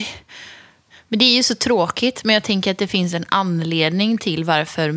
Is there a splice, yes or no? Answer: no